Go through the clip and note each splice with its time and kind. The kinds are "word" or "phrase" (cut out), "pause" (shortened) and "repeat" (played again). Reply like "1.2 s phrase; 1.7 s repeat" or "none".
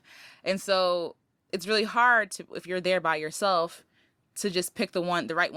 none

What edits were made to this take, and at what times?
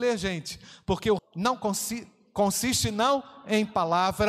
1.2 s phrase

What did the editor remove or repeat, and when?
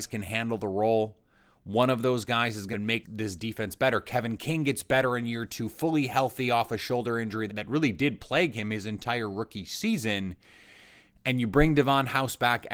2.7 s phrase; 3.0 s word; 7.5 s word

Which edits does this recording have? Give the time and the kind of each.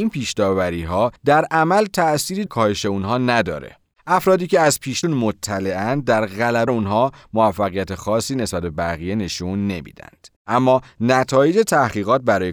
1.2 s pause; 2.5 s word; 3.9 s pause; 5.0 s word; 6.7 s word; 10.4 s pause

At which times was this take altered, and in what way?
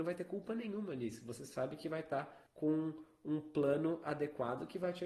2.5 s pause

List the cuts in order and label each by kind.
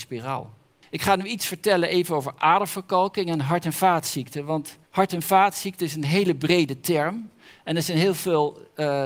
4.8 s pause

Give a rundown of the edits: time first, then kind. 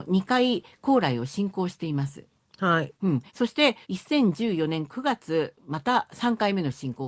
3.3 s pause; 3.8 s pause

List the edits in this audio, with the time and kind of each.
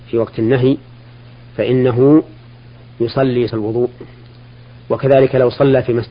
3.5 s word

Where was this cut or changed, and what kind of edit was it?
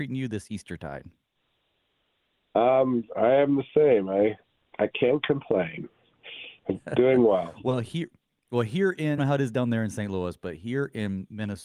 6.6 s pause; 9.2 s phrase

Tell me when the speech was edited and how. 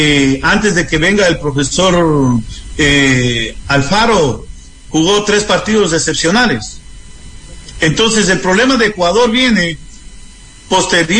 none

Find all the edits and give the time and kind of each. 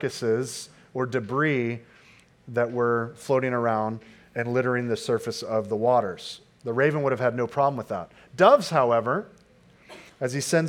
none

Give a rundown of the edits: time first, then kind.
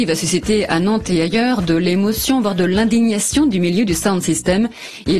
none

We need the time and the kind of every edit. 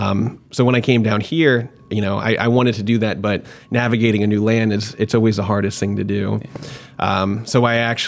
none

